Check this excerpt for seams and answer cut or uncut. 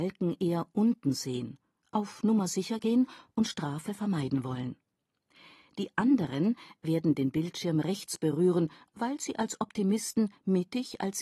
uncut